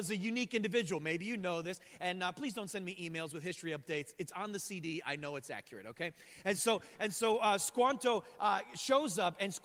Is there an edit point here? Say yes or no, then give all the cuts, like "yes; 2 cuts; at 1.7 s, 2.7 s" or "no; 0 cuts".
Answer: no; 0 cuts